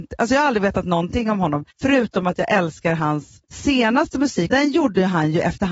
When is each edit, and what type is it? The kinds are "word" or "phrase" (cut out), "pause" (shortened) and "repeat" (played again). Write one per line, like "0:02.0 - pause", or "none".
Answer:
0:01.7 - pause
0:03.4 - pause
0:04.5 - word